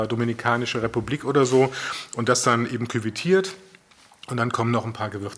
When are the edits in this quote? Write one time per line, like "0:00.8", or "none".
none

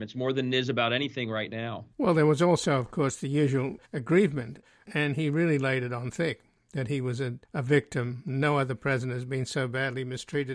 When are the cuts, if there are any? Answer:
0:01.9
0:03.8
0:07.4

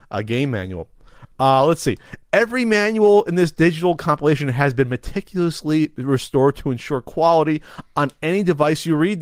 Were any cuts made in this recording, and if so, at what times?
none

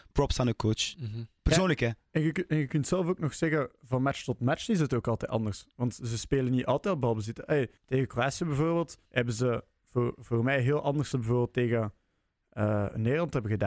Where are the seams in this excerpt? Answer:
0:07.8
0:09.1
0:11.1

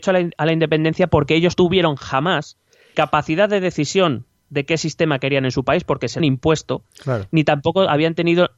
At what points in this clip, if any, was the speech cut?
0:01.5
0:02.9
0:06.2

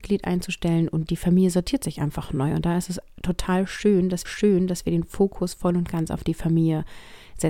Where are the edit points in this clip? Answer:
0:04.2

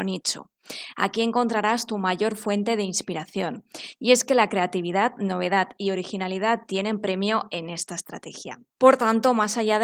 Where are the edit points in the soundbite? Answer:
0:08.7

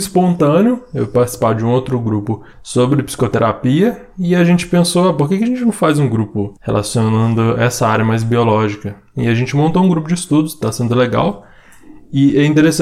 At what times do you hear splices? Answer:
0:02.5
0:06.6

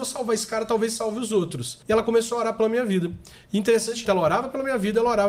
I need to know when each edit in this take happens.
0:01.8
0:04.0

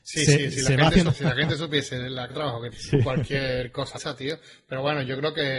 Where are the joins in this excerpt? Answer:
0:01.1
0:02.3
0:02.7
0:03.9

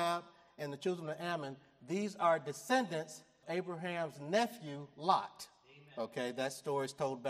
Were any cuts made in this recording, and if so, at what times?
0:03.4

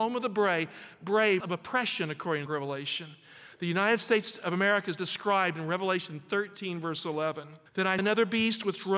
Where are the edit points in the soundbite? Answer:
0:01.4
0:02.5
0:07.7
0:08.0

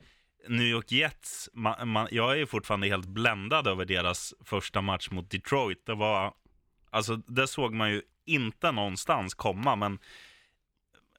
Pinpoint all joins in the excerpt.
none

